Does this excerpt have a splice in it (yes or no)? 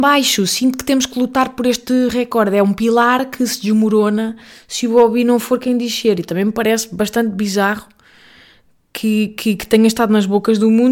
no